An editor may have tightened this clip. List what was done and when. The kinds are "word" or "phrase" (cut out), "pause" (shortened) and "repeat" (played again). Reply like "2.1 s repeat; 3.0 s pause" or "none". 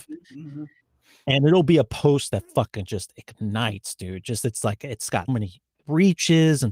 5.3 s word